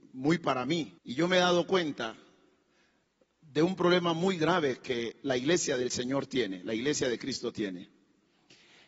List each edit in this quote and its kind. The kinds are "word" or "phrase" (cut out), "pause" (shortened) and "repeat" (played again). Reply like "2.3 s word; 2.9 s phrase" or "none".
1.0 s pause

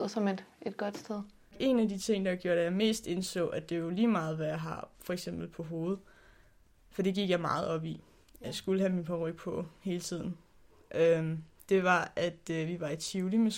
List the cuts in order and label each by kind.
none

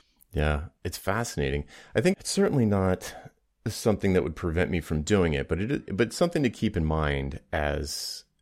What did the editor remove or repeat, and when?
2.1 s word

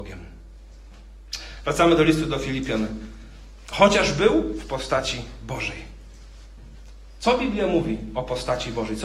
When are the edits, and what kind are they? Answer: none

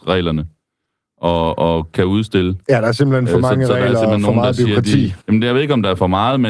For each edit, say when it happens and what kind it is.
2.6 s pause; 5.2 s pause

